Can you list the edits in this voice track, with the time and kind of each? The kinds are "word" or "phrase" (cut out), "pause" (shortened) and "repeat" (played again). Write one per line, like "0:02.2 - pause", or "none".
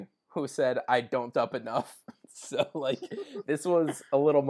0:01.3 - phrase